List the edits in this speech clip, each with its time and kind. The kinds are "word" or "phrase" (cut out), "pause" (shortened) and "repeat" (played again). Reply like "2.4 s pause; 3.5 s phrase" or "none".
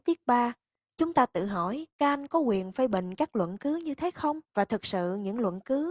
1.9 s pause; 4.4 s pause